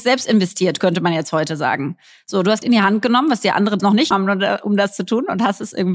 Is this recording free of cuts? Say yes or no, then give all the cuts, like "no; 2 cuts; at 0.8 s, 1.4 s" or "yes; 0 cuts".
no; 3 cuts; at 2.6 s, 3.8 s, 4.1 s